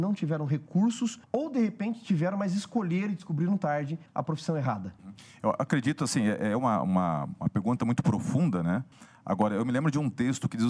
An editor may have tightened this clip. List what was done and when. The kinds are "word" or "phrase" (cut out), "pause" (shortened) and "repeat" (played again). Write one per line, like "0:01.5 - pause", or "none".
none